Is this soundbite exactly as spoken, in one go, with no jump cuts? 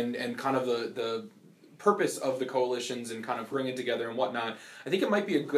no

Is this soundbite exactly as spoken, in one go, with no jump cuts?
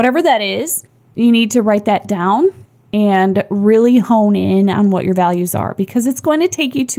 yes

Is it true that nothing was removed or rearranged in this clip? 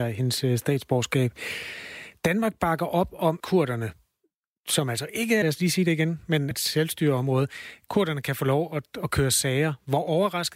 no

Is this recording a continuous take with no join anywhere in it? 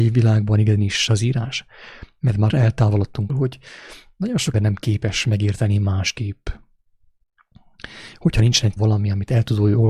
no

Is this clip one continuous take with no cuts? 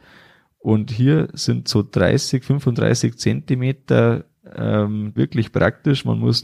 no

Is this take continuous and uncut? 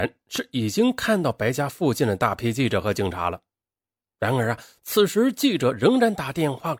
yes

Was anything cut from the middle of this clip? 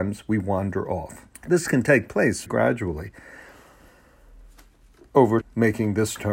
yes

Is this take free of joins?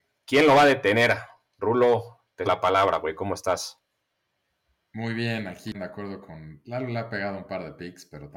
no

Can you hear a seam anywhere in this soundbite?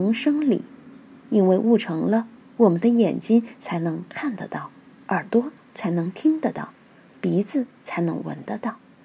no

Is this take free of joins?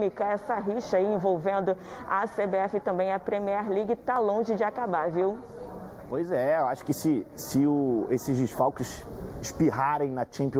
yes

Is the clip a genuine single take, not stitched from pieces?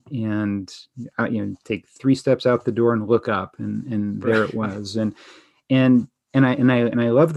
yes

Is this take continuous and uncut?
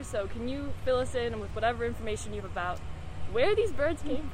no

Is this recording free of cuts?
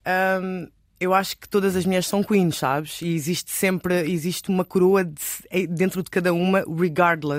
yes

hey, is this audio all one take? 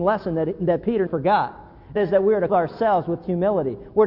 no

